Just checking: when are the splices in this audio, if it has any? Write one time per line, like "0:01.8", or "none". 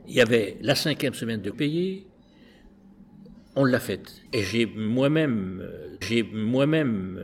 0:01.5
0:04.3
0:06.0